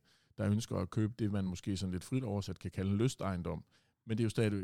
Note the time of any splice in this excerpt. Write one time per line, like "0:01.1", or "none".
none

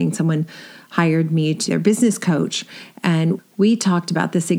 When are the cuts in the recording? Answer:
0:01.7

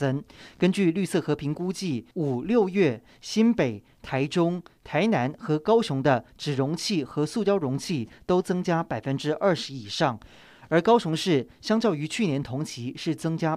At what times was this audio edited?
0:02.1

